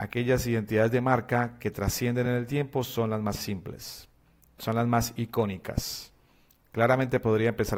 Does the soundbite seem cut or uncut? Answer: uncut